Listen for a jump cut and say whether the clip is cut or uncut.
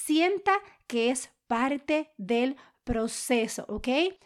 uncut